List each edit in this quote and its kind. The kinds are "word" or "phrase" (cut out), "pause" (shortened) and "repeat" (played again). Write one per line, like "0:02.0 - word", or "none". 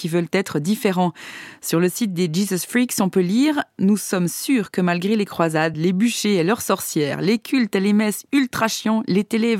none